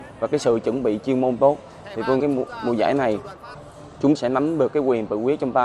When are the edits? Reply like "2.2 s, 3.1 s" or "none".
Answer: 2.2 s, 4.2 s